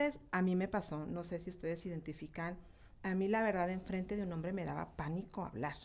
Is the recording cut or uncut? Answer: uncut